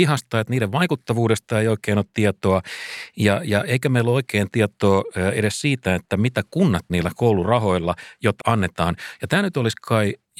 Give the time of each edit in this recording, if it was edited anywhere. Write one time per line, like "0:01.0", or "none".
0:06.9
0:08.4